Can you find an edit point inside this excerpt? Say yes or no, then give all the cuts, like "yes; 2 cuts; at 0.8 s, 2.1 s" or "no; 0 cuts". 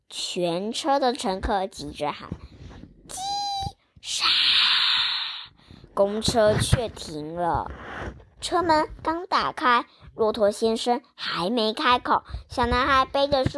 no; 0 cuts